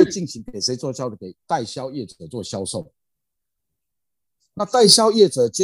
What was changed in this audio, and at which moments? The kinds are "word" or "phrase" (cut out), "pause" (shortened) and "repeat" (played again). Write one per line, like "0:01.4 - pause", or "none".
none